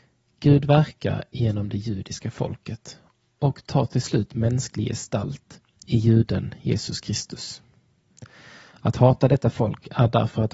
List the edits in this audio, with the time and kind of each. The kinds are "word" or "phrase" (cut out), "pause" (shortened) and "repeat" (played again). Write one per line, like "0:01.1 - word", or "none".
none